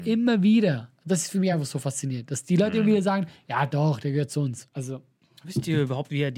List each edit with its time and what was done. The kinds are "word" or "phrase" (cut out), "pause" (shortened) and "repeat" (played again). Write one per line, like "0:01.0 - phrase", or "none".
none